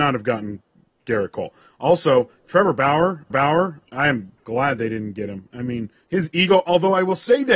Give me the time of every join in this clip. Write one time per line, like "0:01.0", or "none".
0:03.3